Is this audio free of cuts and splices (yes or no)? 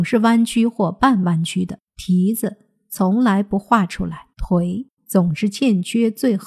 no